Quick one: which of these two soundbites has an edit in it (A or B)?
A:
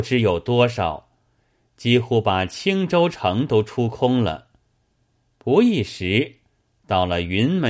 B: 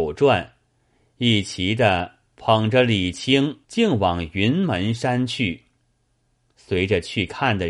B